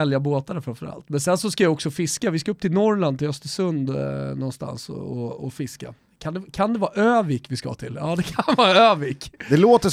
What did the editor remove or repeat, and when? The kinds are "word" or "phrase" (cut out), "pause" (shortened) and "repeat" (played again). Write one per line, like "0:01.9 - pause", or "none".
none